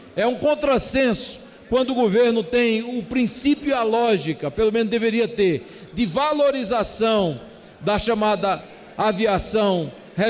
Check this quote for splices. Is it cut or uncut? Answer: uncut